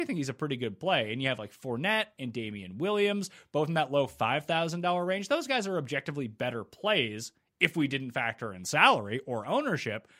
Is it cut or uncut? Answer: uncut